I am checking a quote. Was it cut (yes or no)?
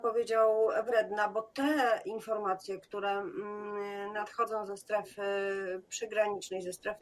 no